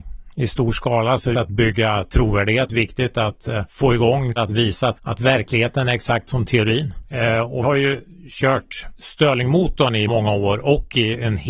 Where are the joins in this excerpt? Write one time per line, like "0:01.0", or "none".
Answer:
0:01.3
0:02.7
0:03.7
0:04.4
0:05.0
0:06.3
0:07.6
0:10.1